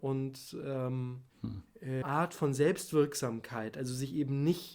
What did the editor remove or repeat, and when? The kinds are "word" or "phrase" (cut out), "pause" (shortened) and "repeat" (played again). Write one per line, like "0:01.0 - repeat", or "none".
0:01.3 - pause
0:02.0 - phrase